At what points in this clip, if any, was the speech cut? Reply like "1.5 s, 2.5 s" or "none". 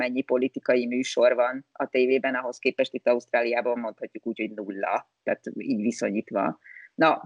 none